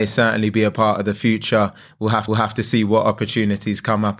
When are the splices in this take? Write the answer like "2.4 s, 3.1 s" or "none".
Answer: 2.3 s